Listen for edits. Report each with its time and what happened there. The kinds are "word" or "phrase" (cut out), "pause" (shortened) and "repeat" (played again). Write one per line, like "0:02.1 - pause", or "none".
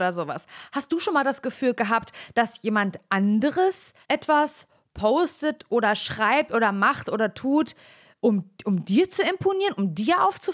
0:04.0 - pause